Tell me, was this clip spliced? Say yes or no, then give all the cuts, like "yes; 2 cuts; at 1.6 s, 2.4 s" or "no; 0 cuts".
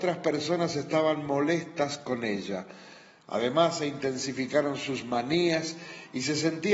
no; 0 cuts